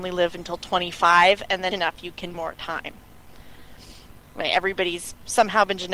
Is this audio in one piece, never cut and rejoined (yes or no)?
no